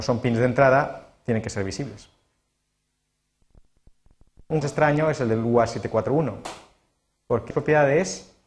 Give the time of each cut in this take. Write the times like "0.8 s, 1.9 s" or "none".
4.6 s, 7.5 s